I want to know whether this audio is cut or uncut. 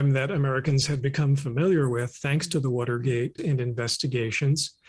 cut